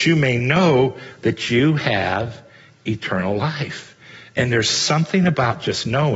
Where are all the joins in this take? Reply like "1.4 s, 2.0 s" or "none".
none